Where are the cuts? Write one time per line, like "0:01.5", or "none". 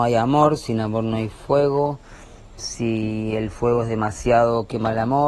none